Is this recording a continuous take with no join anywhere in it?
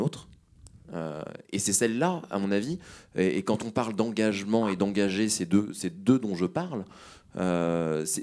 yes; 0 cuts

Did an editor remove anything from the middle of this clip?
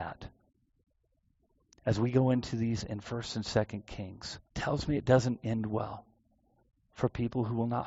yes; 2 cuts; at 2.8 s, 4.5 s

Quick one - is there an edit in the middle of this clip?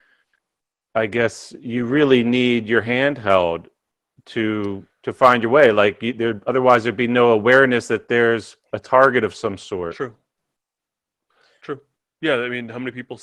no; 0 cuts

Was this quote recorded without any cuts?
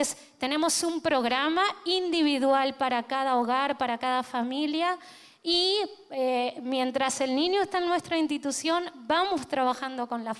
yes; 0 cuts

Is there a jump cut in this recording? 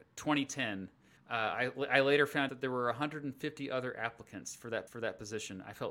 yes; 3 cuts; at 1.2 s, 2.5 s, 4.9 s

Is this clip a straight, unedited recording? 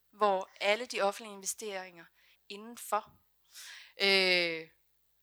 no; 1 cut; at 2.3 s

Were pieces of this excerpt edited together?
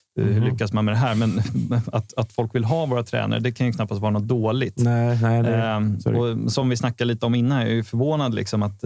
no; 0 cuts

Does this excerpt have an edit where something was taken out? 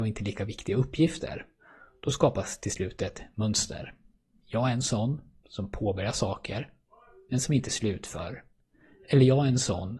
no; 0 cuts

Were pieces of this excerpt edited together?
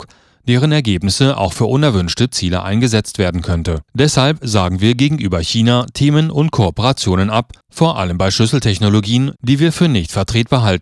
yes; 2 cuts; at 3.9 s, 7.6 s

